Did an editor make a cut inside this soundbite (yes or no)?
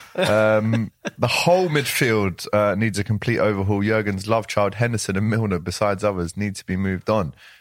no